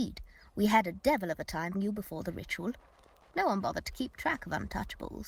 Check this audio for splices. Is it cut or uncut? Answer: cut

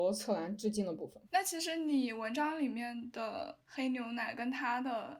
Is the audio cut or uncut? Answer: cut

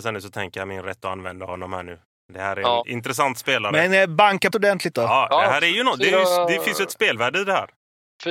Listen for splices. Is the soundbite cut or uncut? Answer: cut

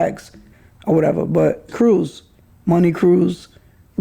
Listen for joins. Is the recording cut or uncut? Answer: cut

